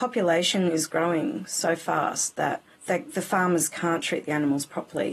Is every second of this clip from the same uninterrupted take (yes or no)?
no